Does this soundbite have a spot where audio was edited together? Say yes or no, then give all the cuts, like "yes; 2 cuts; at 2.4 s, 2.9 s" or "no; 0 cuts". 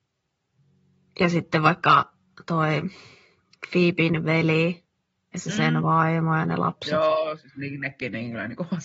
no; 0 cuts